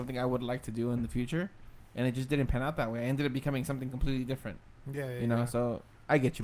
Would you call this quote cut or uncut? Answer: uncut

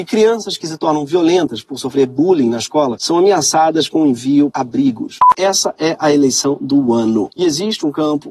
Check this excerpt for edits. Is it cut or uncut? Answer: cut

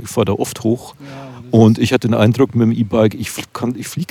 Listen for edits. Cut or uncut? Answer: uncut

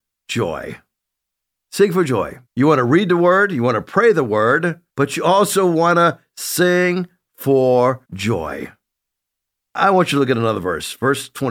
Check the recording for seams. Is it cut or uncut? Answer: cut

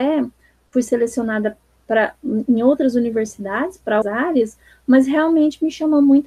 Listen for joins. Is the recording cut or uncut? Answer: cut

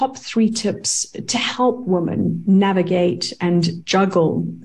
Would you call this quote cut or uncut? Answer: uncut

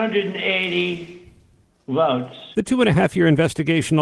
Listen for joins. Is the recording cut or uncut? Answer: uncut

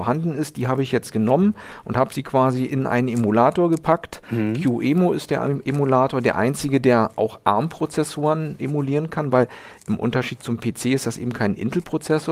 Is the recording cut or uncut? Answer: uncut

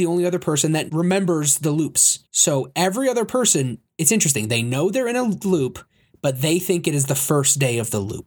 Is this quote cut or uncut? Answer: cut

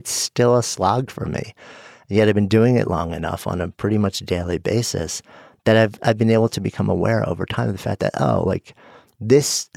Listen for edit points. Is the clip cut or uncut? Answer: uncut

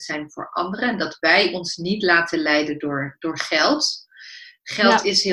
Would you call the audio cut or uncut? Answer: uncut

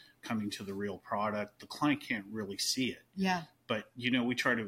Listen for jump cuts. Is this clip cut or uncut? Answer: uncut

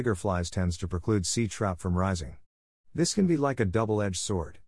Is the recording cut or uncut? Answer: uncut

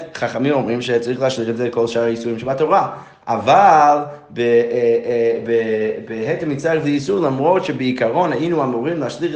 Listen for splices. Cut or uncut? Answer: uncut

